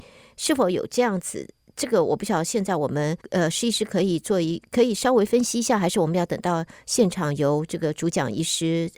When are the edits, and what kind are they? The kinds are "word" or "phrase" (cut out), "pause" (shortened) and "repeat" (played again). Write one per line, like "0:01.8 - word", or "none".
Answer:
0:03.2 - pause

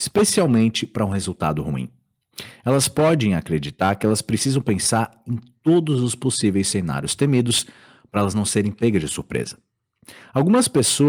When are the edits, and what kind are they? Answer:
none

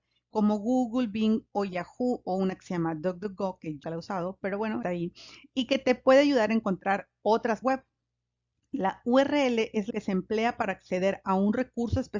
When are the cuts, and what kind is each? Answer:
0:03.8 - word
0:04.8 - phrase
0:07.6 - word
0:09.9 - word

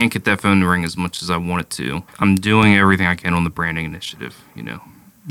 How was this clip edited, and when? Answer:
0:02.1 - pause

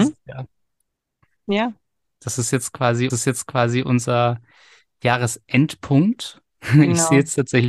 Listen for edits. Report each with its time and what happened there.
0:03.1 - repeat
0:06.5 - pause

